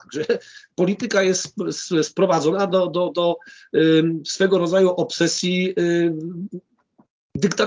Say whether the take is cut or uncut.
uncut